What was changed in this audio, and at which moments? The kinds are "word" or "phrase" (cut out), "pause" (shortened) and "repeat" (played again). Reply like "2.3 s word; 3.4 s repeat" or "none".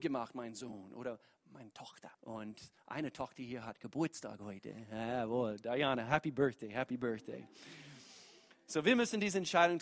2.1 s pause